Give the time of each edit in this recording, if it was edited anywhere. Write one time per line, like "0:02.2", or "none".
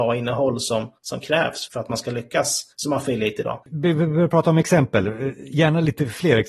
0:01.0
0:01.7
0:02.7
0:03.6